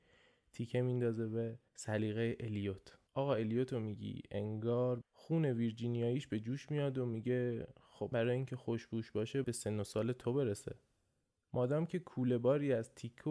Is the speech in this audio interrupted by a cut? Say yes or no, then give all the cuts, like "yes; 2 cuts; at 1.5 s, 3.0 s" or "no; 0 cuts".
yes; 5 cuts; at 1.7 s, 3.1 s, 5.0 s, 8.1 s, 9.4 s